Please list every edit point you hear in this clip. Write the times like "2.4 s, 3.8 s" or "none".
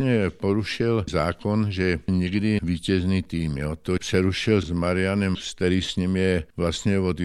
1.1 s, 2.6 s, 4.0 s, 4.6 s, 5.3 s